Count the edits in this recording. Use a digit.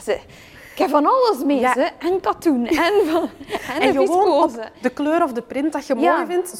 0